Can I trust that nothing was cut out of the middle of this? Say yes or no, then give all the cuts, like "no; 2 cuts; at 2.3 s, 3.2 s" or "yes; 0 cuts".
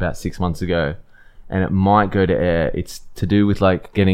yes; 0 cuts